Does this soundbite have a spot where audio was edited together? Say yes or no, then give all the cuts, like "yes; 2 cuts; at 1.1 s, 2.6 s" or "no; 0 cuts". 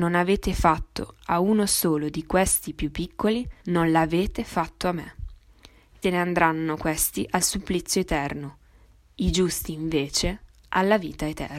yes; 2 cuts; at 3.6 s, 6.0 s